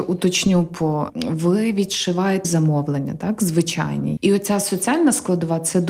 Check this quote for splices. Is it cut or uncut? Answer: cut